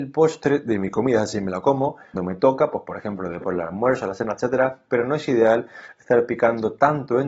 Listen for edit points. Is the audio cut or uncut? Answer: cut